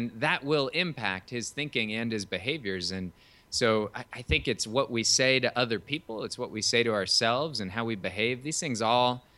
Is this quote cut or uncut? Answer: uncut